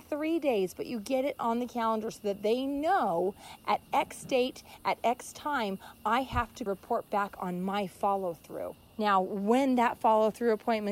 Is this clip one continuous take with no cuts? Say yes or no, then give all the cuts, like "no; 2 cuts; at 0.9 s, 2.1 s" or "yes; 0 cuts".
yes; 0 cuts